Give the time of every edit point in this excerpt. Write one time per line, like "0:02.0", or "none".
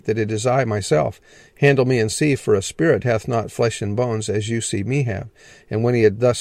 none